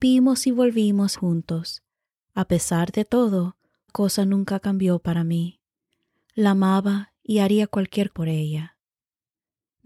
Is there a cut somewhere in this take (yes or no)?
yes